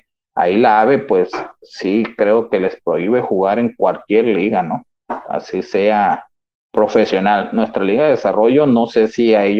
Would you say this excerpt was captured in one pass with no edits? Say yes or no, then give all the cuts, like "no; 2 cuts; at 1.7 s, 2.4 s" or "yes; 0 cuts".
yes; 0 cuts